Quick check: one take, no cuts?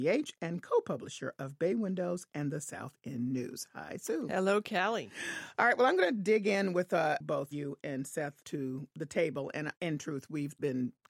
no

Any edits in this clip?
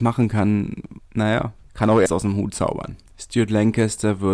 yes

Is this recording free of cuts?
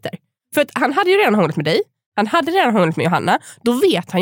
yes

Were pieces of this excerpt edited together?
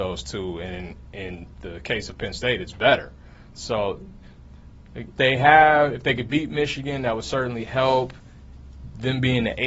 yes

